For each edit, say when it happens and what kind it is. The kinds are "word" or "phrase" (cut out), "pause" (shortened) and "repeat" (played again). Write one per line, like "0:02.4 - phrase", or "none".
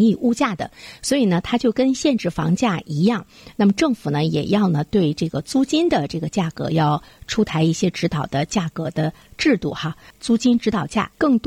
none